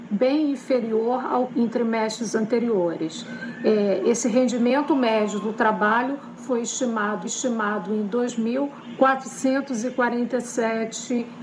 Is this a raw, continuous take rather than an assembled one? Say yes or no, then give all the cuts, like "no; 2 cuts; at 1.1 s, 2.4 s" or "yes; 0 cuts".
no; 2 cuts; at 1.5 s, 7.2 s